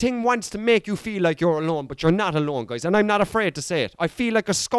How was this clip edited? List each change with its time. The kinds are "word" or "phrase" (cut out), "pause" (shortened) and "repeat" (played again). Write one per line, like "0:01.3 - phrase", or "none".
none